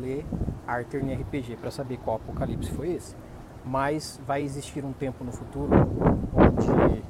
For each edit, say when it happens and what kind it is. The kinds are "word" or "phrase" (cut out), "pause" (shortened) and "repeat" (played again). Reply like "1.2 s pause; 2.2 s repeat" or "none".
none